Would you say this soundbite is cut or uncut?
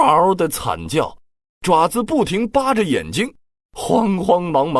uncut